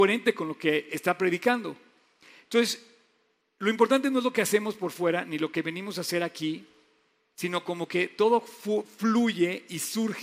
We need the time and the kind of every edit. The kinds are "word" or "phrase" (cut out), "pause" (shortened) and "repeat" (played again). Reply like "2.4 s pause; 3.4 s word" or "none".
none